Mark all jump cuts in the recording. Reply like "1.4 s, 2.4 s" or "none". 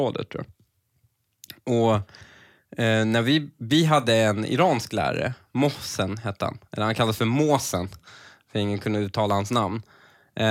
none